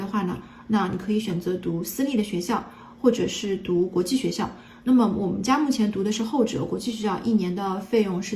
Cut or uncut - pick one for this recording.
uncut